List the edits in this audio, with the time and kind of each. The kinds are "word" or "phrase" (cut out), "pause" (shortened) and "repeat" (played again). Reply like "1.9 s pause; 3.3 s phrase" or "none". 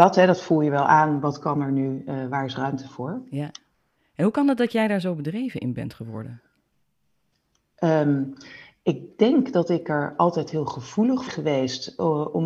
11.3 s phrase